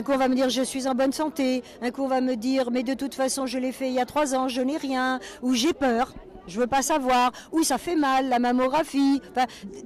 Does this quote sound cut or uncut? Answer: uncut